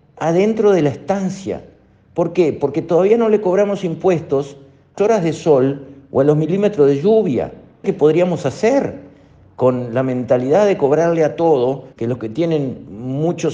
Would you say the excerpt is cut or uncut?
cut